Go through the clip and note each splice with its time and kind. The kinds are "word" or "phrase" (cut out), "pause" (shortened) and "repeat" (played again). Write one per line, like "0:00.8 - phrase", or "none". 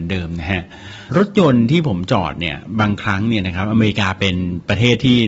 0:01.1 - pause